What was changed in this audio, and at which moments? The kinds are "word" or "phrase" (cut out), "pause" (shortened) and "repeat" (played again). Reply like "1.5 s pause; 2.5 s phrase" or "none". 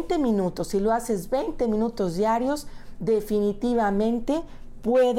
none